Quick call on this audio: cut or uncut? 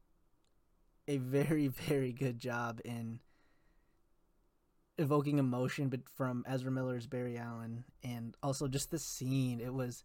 uncut